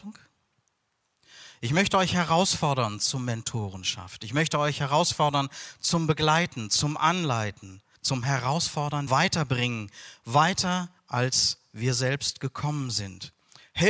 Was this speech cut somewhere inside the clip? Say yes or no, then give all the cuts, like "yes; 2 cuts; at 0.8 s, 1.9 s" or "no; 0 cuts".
yes; 3 cuts; at 8.0 s, 9.1 s, 11.0 s